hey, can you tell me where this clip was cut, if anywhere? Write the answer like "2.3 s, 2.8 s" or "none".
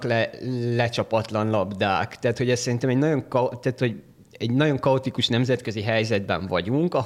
none